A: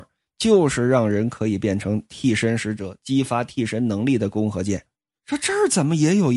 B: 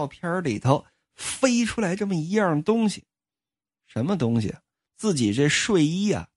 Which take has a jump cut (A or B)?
A